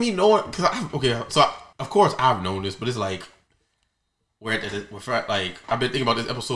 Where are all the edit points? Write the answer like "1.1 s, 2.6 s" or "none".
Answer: 1.7 s